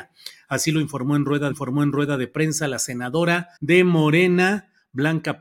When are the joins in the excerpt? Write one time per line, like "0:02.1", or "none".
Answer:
0:01.5
0:03.6